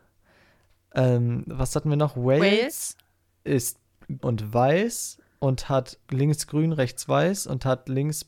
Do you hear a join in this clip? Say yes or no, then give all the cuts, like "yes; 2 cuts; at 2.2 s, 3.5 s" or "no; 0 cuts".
yes; 2 cuts; at 4.2 s, 6.0 s